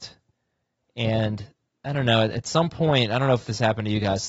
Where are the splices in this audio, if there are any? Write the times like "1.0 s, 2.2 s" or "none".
none